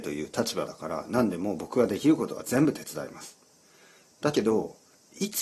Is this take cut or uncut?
uncut